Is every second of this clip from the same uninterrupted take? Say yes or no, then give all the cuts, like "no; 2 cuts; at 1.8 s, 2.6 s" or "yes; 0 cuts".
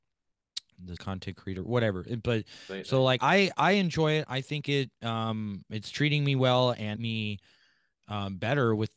no; 3 cuts; at 1.0 s, 3.2 s, 7.0 s